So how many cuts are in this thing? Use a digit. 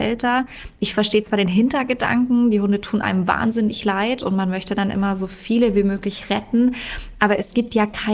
0